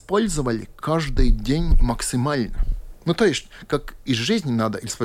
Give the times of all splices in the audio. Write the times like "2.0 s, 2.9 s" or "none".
none